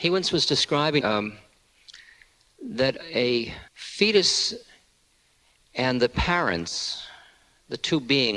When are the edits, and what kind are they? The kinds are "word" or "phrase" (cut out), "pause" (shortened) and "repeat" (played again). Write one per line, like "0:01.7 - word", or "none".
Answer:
0:01.0 - phrase
0:03.7 - pause